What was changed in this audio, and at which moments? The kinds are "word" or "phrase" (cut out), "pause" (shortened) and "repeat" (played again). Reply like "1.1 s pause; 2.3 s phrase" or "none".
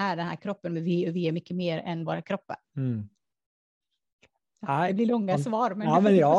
2.1 s word; 2.6 s pause